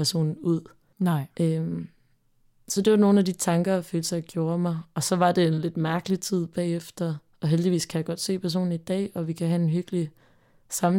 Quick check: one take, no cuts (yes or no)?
yes